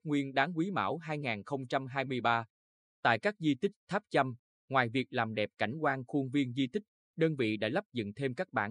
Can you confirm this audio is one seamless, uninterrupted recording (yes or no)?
yes